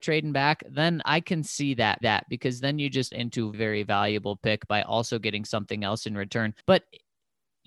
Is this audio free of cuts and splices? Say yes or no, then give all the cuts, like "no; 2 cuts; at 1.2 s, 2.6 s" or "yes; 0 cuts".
no; 5 cuts; at 1.0 s, 2.0 s, 3.1 s, 3.5 s, 6.6 s